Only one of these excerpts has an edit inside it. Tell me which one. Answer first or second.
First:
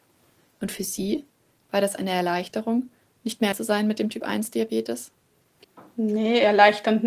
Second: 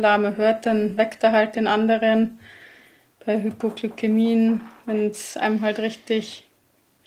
first